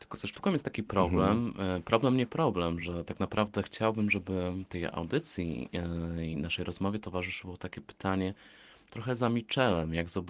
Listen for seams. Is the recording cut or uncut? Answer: uncut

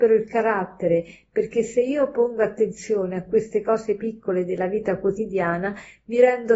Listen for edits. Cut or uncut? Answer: uncut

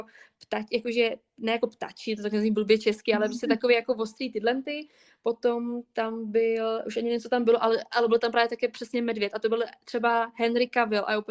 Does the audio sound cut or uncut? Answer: uncut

